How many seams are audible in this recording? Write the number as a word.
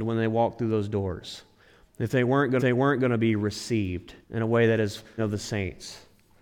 three